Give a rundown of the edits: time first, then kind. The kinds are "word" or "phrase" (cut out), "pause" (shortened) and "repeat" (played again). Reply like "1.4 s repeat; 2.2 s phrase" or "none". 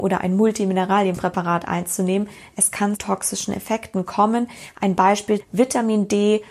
3.0 s word; 5.4 s word